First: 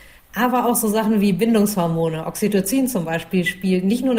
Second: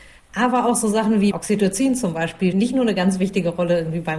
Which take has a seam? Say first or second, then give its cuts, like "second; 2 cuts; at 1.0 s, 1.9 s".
second; 2 cuts; at 1.3 s, 2.5 s